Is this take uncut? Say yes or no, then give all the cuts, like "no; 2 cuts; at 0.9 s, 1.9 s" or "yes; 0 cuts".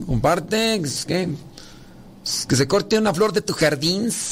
yes; 0 cuts